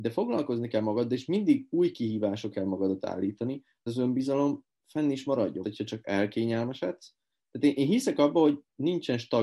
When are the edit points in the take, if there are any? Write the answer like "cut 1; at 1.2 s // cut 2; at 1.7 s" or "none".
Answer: cut 1; at 2.5 s // cut 2; at 3.9 s // cut 3; at 5.6 s